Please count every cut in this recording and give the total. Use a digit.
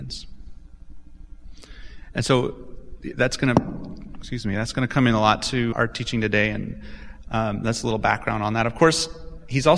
1